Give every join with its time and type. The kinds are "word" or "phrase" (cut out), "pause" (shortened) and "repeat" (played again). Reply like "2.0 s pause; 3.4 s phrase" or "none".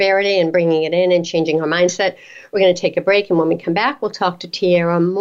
none